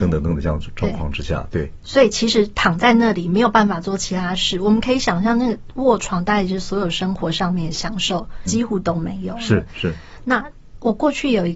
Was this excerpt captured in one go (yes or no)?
no